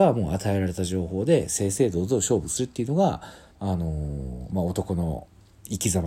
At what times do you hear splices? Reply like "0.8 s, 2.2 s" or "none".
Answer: 3.5 s